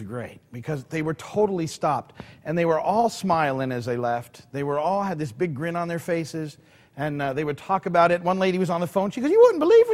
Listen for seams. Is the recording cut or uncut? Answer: uncut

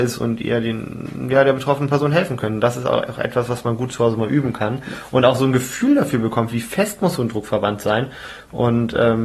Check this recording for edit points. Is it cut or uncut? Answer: uncut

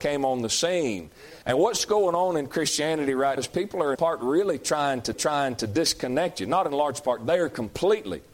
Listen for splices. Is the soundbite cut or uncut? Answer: cut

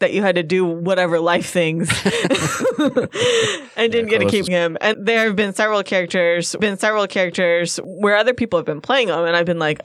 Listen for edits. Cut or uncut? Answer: cut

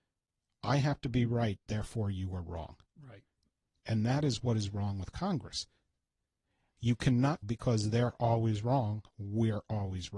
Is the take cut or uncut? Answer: cut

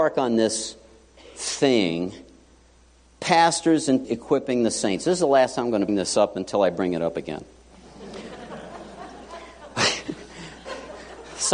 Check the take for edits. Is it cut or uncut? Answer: cut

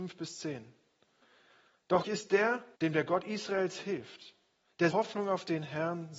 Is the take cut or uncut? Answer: cut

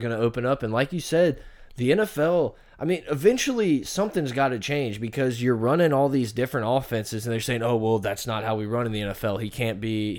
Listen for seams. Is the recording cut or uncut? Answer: uncut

